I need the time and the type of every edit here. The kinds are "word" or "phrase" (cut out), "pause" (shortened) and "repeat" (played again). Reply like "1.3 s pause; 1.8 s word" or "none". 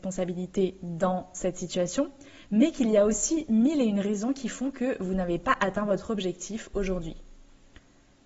none